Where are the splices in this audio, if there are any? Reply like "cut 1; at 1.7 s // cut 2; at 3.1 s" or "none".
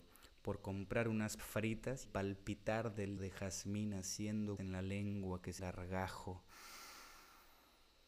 cut 1; at 1.4 s // cut 2; at 2.0 s // cut 3; at 3.2 s // cut 4; at 4.6 s // cut 5; at 5.6 s